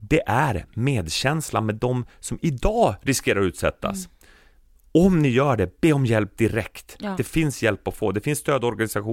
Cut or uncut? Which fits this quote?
uncut